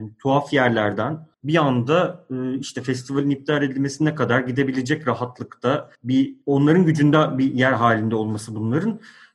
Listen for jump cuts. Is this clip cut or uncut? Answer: cut